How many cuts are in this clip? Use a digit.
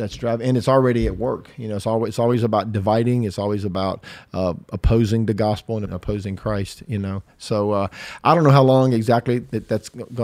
1